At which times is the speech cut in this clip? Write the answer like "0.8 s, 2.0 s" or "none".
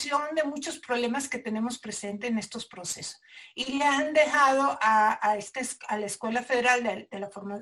none